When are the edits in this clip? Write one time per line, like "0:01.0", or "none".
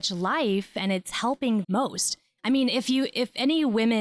0:01.6